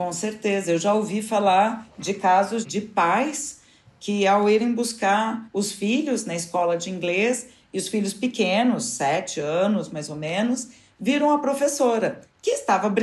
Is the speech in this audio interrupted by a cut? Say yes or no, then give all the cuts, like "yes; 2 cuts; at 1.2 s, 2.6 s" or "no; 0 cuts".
no; 0 cuts